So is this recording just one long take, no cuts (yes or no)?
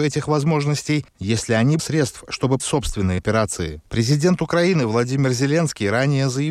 no